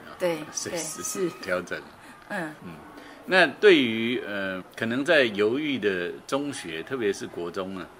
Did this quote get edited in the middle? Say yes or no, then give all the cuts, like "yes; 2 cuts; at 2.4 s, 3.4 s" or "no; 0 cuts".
yes; 2 cuts; at 2.6 s, 4.6 s